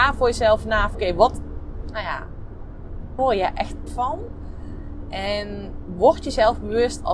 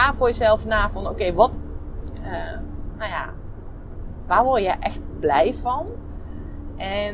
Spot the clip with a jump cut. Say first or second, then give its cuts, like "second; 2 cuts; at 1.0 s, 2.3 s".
first; 4 cuts; at 0.9 s, 1.9 s, 3.2 s, 3.9 s